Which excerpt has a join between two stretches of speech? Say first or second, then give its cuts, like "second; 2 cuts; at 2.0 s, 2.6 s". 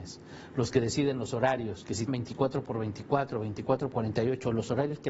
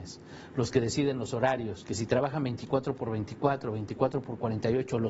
first; 2 cuts; at 2.1 s, 3.9 s